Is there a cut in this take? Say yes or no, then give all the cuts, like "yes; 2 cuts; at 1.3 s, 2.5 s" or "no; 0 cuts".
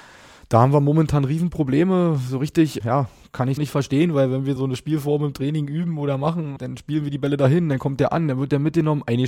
yes; 4 cuts; at 2.8 s, 3.6 s, 4.6 s, 6.6 s